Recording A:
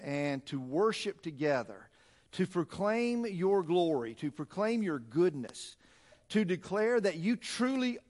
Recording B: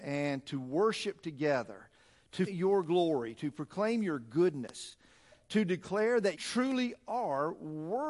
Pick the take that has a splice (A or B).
B